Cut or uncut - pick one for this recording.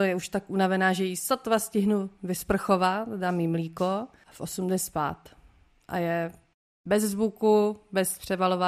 uncut